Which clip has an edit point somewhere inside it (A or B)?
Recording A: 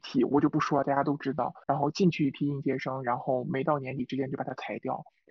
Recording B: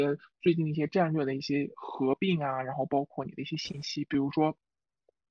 A